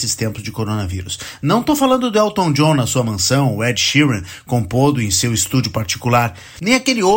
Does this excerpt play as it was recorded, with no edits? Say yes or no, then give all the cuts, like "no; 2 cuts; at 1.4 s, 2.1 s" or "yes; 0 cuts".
yes; 0 cuts